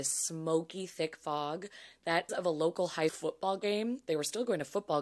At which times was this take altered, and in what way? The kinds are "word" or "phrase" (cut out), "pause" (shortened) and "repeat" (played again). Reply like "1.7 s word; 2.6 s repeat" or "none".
2.3 s word; 3.1 s word